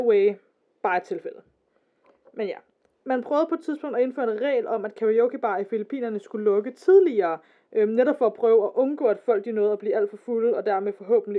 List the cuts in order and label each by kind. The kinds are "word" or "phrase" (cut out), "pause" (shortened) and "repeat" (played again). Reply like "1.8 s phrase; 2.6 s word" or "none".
none